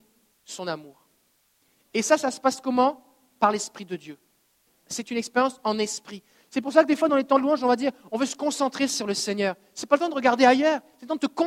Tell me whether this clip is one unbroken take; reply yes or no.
yes